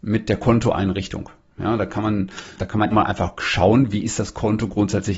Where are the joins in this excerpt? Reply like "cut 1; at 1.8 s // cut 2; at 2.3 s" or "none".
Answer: cut 1; at 2.6 s // cut 2; at 2.9 s